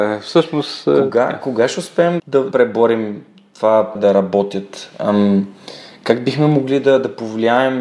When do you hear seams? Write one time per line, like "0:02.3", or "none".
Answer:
0:02.2
0:02.5
0:04.0